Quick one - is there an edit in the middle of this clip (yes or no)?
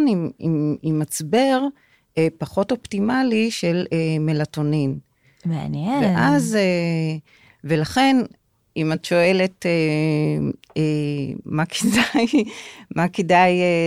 no